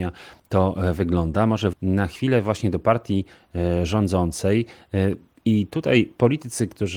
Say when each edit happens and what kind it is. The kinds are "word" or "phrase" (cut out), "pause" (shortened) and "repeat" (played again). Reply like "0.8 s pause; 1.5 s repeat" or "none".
1.7 s word